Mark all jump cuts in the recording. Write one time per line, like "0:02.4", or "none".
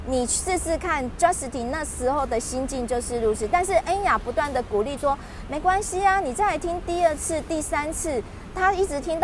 0:05.0